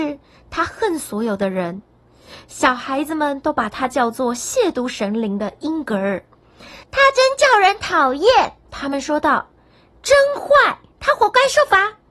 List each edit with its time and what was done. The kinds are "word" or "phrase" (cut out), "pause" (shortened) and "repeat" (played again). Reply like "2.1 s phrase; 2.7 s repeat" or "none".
6.8 s pause; 8.6 s pause